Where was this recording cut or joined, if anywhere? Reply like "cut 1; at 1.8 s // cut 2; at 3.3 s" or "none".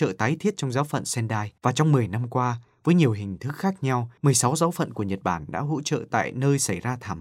cut 1; at 1.6 s // cut 2; at 4.2 s